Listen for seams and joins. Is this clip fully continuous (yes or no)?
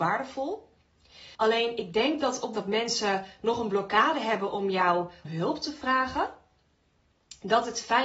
no